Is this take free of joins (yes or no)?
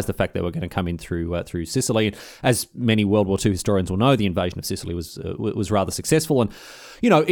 yes